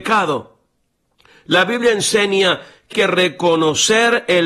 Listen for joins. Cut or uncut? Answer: cut